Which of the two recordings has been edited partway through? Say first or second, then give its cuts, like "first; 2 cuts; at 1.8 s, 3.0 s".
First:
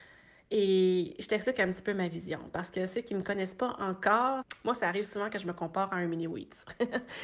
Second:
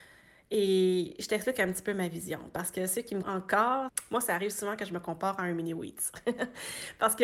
second; 1 cut; at 3.2 s